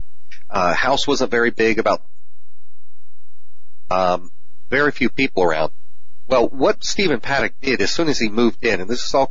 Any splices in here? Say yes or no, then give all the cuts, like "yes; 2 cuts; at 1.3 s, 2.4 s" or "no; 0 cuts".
no; 0 cuts